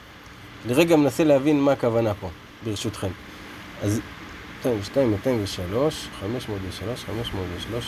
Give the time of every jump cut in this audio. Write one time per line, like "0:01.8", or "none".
none

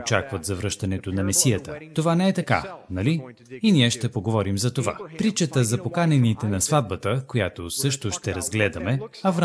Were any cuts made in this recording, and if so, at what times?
none

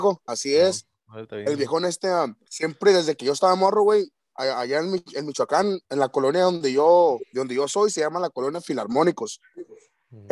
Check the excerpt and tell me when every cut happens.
0:02.4
0:05.8

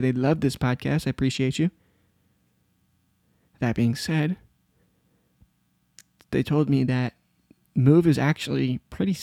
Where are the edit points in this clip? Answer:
none

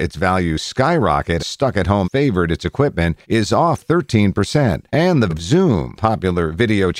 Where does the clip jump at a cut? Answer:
0:01.4
0:02.0
0:03.2
0:03.8
0:04.9
0:05.3
0:05.9

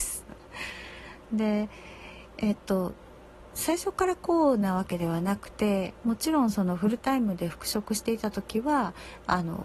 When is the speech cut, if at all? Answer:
none

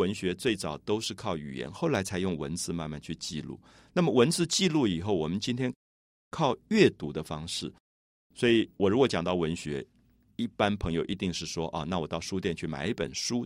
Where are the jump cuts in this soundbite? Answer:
0:08.7

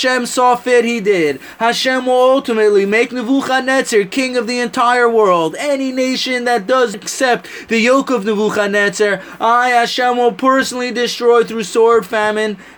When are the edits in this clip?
0:06.9

